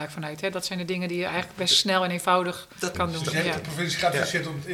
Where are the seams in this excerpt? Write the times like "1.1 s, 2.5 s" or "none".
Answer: 2.9 s